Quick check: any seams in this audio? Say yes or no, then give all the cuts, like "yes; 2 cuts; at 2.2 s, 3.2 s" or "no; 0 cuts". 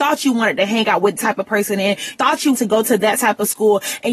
yes; 3 cuts; at 1.2 s, 2.1 s, 2.5 s